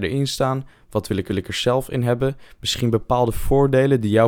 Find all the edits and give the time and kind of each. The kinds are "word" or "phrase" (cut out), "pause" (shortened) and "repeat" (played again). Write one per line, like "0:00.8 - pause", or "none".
0:01.3 - repeat